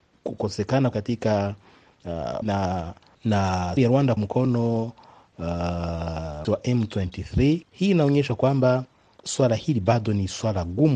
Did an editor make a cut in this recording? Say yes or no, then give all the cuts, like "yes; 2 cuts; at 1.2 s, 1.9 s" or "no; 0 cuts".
yes; 7 cuts; at 0.9 s, 2.4 s, 3.8 s, 4.2 s, 6.4 s, 7.6 s, 9.2 s